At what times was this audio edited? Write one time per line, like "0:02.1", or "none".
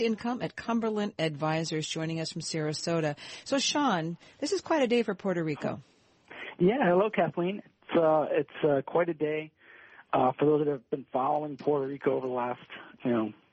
none